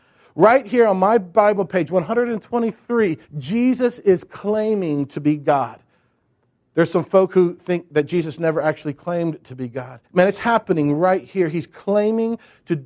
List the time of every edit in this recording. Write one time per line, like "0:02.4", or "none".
0:03.2
0:10.1